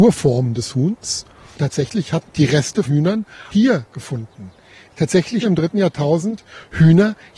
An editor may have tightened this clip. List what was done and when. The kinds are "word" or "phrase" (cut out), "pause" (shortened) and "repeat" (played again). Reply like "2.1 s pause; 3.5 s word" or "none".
1.6 s word; 2.3 s word; 2.9 s word; 3.5 s word; 5.4 s word